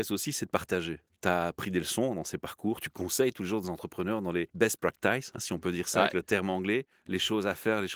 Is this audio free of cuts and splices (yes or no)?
yes